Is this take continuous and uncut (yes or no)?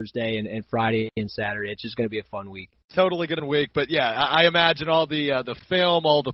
no